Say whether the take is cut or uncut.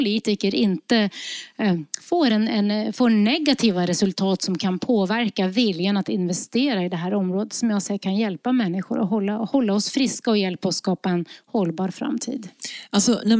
uncut